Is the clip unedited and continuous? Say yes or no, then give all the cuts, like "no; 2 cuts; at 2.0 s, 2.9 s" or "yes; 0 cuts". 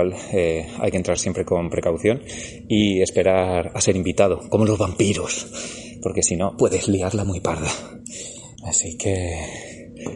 yes; 0 cuts